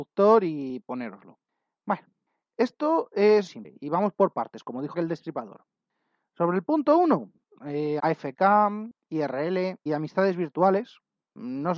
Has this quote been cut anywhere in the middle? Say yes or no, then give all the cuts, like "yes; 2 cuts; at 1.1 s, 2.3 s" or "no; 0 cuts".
yes; 4 cuts; at 3.5 s, 4.9 s, 8.0 s, 9.9 s